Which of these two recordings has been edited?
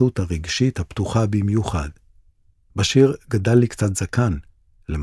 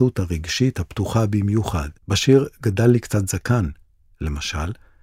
second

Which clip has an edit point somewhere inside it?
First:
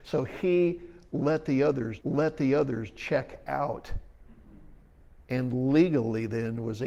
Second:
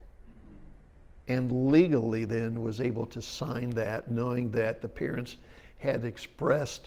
first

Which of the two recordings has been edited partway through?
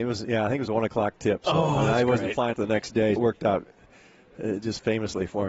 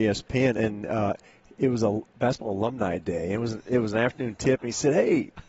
first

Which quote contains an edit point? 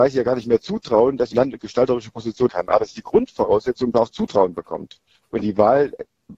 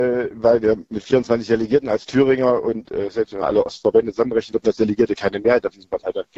first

